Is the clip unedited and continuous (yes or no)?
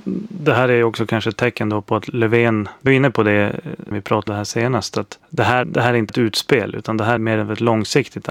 no